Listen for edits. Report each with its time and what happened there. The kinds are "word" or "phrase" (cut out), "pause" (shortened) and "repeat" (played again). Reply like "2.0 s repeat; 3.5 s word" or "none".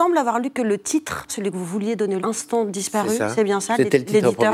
1.3 s word; 2.2 s phrase